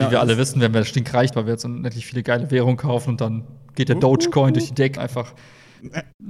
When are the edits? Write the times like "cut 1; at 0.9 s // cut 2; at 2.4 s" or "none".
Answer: cut 1; at 1.3 s // cut 2; at 5.0 s